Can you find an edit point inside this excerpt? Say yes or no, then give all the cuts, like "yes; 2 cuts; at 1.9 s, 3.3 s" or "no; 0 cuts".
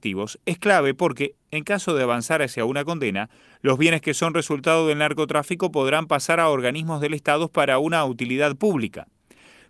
no; 0 cuts